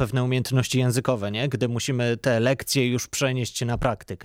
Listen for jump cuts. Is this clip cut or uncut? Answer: uncut